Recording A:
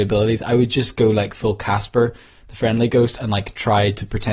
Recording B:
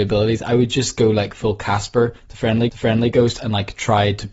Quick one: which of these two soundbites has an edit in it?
B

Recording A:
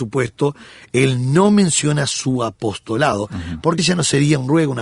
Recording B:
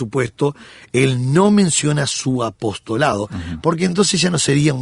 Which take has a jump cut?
A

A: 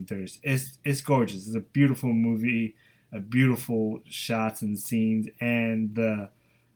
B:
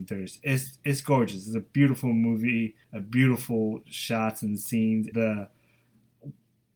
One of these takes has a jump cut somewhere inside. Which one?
B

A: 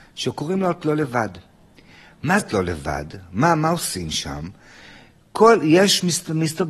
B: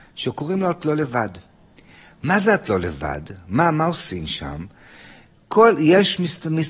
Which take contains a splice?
A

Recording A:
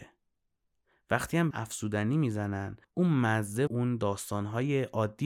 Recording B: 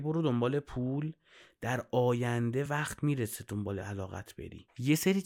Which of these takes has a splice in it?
A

